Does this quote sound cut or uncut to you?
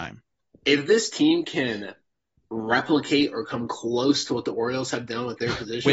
uncut